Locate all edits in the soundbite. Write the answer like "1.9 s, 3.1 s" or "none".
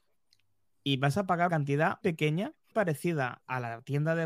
1.5 s, 2.0 s, 2.7 s